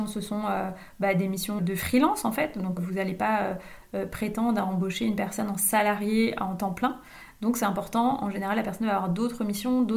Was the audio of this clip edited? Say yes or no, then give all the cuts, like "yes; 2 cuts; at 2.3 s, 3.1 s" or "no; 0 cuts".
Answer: yes; 2 cuts; at 1.6 s, 2.8 s